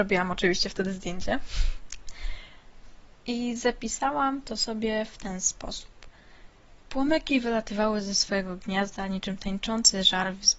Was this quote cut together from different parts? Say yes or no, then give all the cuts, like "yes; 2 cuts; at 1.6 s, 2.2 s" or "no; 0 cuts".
no; 0 cuts